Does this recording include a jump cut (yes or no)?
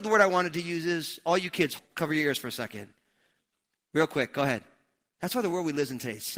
no